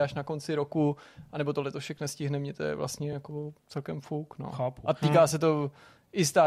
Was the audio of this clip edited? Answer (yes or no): no